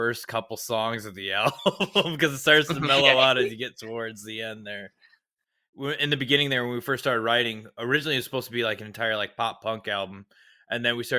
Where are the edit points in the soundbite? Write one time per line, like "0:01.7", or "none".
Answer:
none